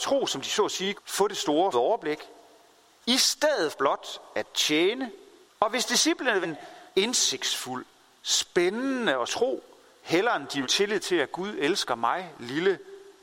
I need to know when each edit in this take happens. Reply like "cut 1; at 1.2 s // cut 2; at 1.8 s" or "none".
cut 1; at 1.0 s // cut 2; at 1.7 s // cut 3; at 3.7 s // cut 4; at 5.5 s // cut 5; at 6.4 s // cut 6; at 6.9 s // cut 7; at 9.3 s // cut 8; at 10.6 s